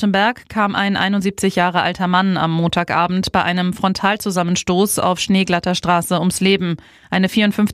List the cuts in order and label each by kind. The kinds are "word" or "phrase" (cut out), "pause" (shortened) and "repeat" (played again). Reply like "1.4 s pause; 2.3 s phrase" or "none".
none

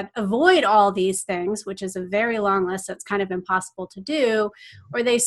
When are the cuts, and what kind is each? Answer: none

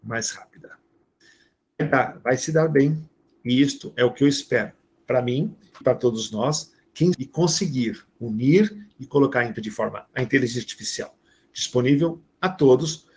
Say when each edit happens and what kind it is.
5.8 s word; 7.1 s word; 9.5 s word; 10.1 s word

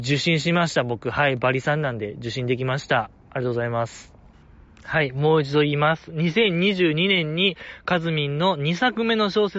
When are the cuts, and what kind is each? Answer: none

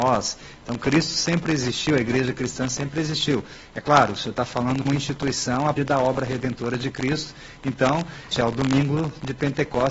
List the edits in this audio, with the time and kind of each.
4.8 s word; 5.8 s word; 8.3 s word

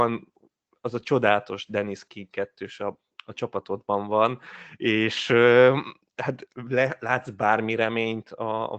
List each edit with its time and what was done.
none

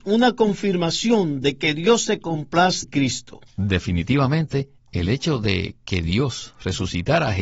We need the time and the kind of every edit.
2.8 s word; 3.5 s pause

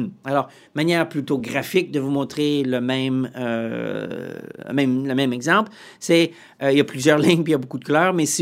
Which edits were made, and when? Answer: none

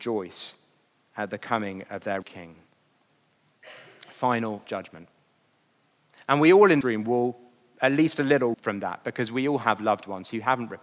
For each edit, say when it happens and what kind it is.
2.2 s word; 4.6 s word; 6.8 s word; 8.5 s word

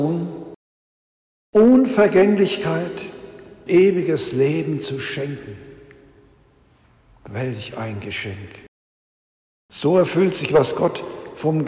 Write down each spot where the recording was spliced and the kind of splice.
3.7 s word

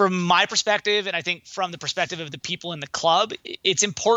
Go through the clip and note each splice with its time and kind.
none

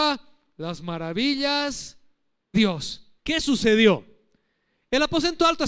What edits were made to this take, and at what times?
2.5 s word; 3.2 s pause

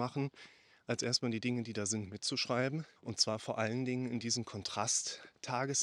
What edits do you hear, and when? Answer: 3.0 s pause

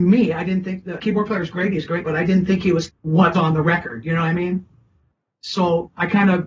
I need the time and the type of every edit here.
1.0 s word; 2.0 s word; 2.9 s word; 3.3 s word

